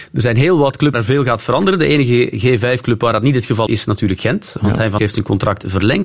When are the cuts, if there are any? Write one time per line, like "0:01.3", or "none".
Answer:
0:00.9
0:03.7
0:05.0